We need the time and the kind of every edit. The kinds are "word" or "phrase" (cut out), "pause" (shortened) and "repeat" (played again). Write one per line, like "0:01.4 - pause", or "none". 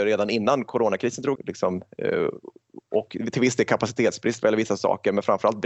0:01.4 - phrase